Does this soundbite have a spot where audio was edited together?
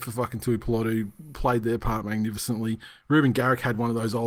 no; 0 cuts

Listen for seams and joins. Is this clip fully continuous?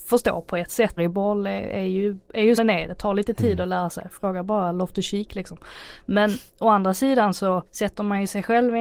no; 4 cuts; at 1.0 s, 2.6 s, 6.5 s, 7.7 s

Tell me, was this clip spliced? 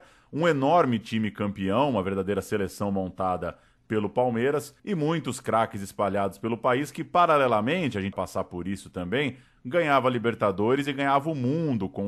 yes; 2 cuts; at 4.8 s, 8.1 s

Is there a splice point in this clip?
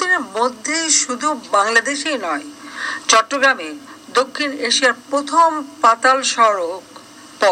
no; 0 cuts

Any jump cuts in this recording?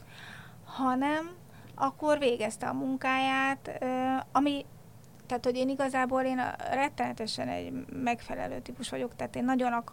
no; 0 cuts

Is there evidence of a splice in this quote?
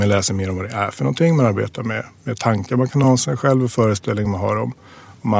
no; 0 cuts

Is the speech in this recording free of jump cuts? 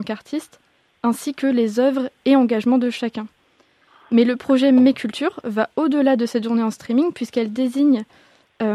yes; 0 cuts

